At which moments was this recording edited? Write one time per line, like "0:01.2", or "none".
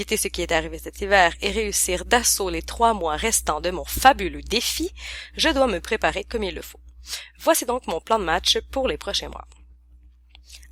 none